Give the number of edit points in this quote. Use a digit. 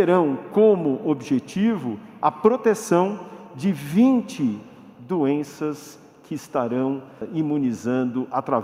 0